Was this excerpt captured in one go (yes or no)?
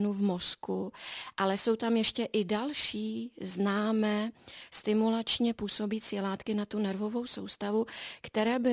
yes